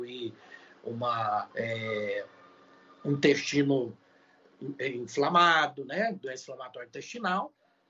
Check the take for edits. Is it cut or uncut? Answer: cut